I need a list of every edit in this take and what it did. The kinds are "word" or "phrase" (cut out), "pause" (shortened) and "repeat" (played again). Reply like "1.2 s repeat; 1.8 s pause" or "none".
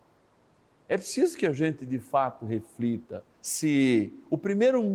3.3 s pause